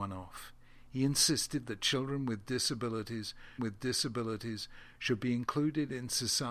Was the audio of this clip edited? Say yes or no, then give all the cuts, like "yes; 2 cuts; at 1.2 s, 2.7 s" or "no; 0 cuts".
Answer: yes; 1 cut; at 3.6 s